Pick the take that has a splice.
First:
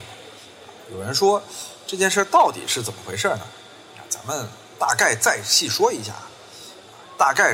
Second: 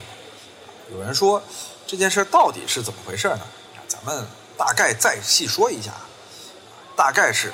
second; 1 cut; at 3.7 s

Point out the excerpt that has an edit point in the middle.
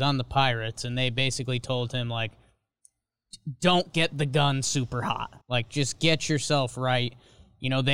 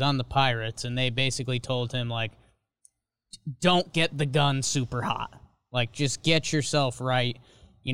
first; 1 cut; at 5.4 s

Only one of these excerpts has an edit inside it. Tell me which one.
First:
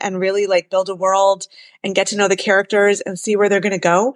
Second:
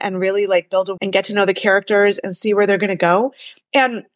second; 1 cut; at 1.0 s

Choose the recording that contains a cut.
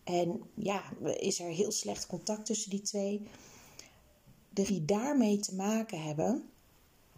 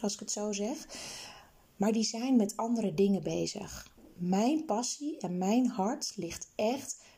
first; 1 cut; at 4.7 s

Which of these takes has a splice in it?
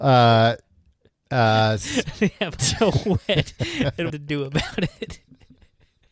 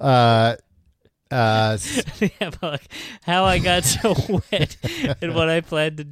first; 2 cuts; at 2.6 s, 4.1 s

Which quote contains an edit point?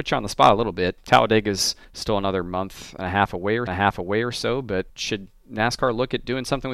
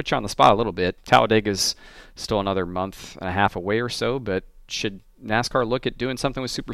first; 3 cuts; at 1.8 s, 3.7 s, 4.9 s

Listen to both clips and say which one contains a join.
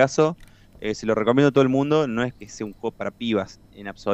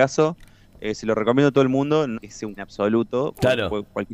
second; 2 cuts; at 2.1 s, 2.6 s

